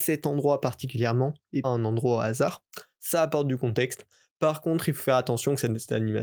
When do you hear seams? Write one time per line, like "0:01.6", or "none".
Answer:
0:01.6